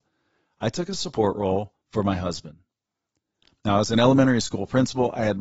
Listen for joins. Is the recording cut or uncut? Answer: cut